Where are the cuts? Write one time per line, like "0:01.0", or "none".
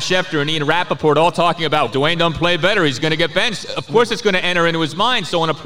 0:01.9